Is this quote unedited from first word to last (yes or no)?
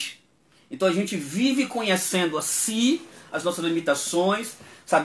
yes